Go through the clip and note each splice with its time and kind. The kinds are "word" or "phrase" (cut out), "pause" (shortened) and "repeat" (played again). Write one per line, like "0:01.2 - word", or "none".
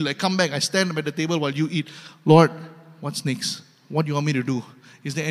none